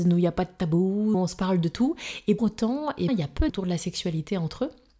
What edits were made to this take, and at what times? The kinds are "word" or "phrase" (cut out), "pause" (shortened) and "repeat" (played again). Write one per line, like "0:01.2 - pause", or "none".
0:01.1 - word
0:02.4 - word
0:03.1 - word
0:03.5 - word